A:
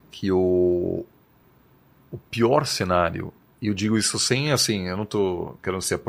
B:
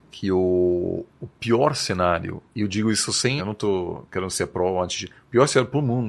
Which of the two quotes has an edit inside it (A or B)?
B